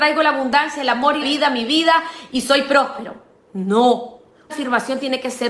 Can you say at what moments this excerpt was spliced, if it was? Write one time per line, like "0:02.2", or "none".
0:01.2
0:04.5